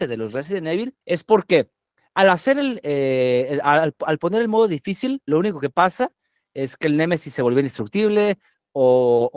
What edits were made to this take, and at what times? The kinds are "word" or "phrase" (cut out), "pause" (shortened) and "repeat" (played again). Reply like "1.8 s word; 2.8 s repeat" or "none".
1.0 s pause

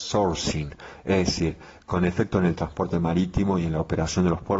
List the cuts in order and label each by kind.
none

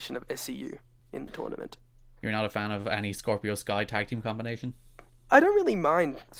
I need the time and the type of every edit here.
none

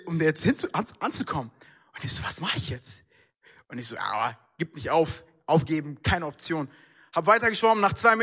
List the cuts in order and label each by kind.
none

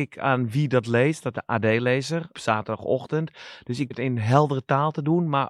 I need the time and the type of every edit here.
1.3 s word; 2.3 s word; 3.9 s word

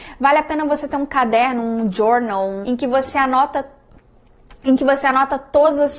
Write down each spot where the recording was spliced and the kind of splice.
2.6 s word

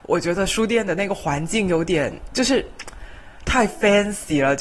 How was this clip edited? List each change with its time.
none

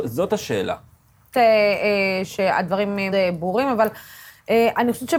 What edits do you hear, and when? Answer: 1.3 s phrase; 3.1 s word

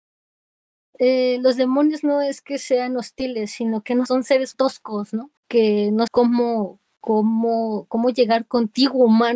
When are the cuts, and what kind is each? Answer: 4.1 s phrase; 4.5 s word; 5.4 s pause; 6.1 s word

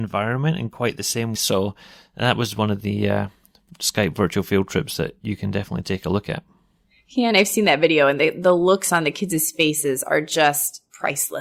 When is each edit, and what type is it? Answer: 1.4 s word

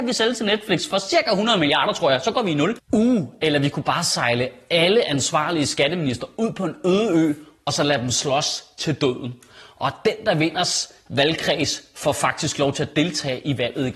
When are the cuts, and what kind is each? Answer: none

